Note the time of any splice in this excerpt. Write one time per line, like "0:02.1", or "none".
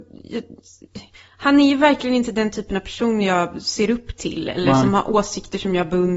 none